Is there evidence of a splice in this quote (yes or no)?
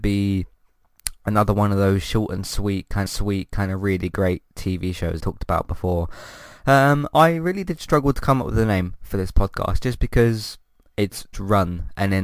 yes